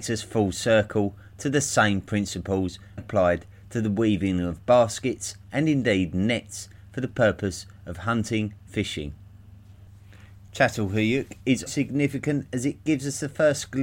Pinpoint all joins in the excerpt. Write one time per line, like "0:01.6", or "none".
0:03.0
0:08.7
0:11.7